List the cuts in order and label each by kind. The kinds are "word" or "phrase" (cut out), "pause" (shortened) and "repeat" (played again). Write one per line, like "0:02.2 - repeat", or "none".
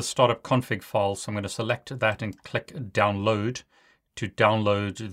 none